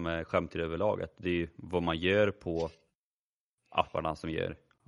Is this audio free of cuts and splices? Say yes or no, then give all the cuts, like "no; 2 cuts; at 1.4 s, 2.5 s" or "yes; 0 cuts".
yes; 0 cuts